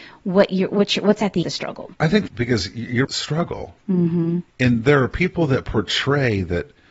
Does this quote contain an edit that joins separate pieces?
yes; 5 cuts; at 1.4 s, 1.9 s, 2.3 s, 3.0 s, 4.5 s

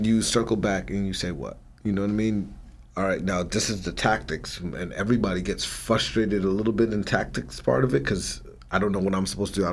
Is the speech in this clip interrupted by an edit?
no; 0 cuts

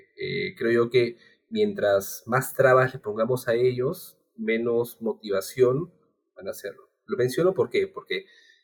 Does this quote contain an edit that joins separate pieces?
no; 0 cuts

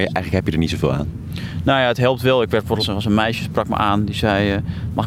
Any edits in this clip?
yes; 1 cut; at 2.8 s

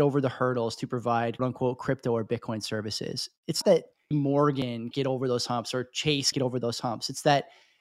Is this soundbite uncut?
no; 5 cuts; at 1.4 s, 3.6 s, 4.1 s, 4.9 s, 6.3 s

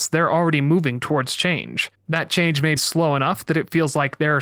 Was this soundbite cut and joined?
yes; 1 cut; at 2.8 s

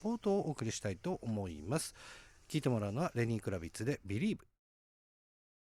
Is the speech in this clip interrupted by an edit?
no; 0 cuts

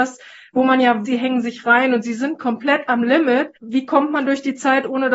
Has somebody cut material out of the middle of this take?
yes; 2 cuts; at 1.1 s, 3.6 s

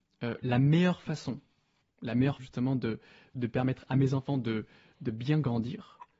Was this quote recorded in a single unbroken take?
no; 1 cut; at 2.4 s

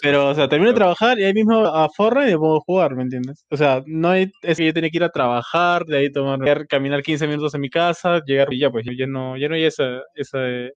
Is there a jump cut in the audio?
yes; 5 cuts; at 1.7 s, 4.6 s, 6.5 s, 8.5 s, 8.9 s

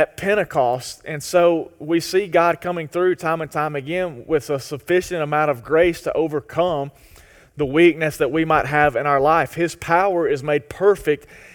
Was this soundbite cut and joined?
no; 0 cuts

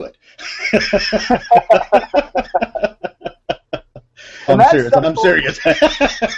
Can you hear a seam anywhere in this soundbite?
yes; 2 cuts; at 4.5 s, 5.0 s

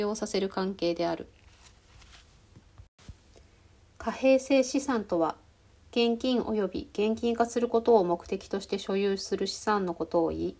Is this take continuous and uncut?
yes; 0 cuts

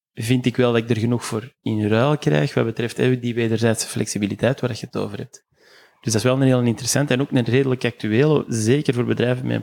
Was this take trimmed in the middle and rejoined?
no; 0 cuts

